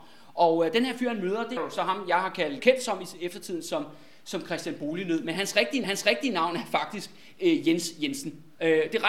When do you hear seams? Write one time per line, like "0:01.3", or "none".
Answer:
0:01.6
0:02.6
0:05.8